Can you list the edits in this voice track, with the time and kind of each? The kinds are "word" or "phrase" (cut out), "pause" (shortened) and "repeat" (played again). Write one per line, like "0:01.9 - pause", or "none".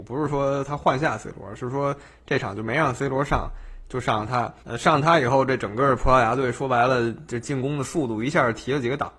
0:04.6 - pause